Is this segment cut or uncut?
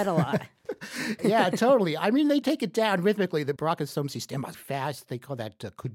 cut